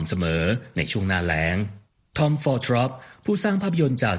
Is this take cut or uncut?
cut